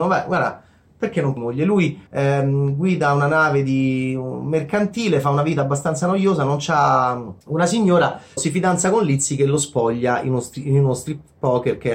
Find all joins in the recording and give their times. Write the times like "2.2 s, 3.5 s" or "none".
1.4 s, 2.1 s, 7.4 s, 8.4 s